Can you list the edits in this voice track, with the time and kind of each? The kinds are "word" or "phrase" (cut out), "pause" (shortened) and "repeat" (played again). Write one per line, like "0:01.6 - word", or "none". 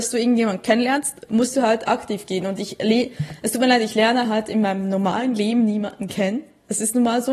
none